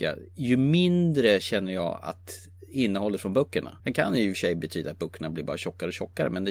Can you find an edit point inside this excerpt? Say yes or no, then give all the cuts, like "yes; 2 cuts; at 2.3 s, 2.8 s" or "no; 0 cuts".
yes; 1 cut; at 3.8 s